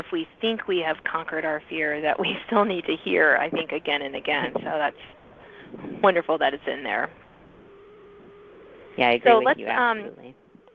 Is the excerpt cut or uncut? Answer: uncut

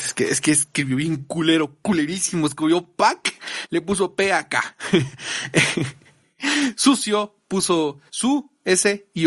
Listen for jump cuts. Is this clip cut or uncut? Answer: cut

